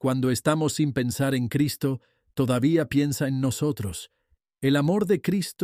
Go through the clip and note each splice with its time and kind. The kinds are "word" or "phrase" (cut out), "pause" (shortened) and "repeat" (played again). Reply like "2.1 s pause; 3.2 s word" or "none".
none